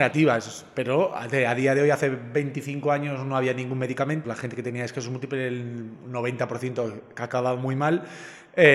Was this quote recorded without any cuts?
no; 1 cut; at 4.2 s

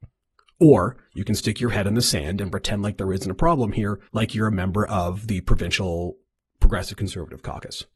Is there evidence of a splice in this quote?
yes; 2 cuts; at 4.1 s, 6.4 s

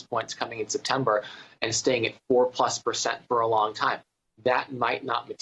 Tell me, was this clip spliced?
no; 0 cuts

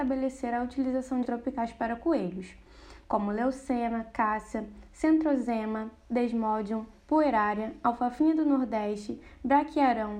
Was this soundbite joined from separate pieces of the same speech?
yes; 1 cut; at 1.2 s

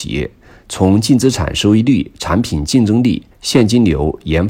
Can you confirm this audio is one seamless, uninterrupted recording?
no; 1 cut; at 3.3 s

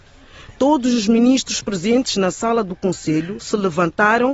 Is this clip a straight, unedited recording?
yes; 0 cuts

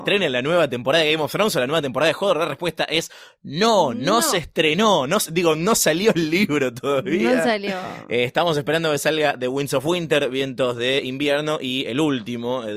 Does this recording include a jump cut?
no; 0 cuts

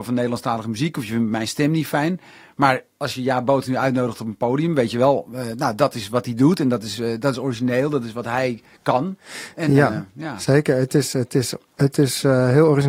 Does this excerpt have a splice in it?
no; 0 cuts

